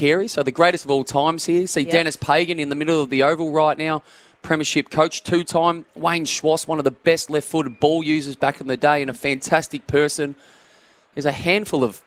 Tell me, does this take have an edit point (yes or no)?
no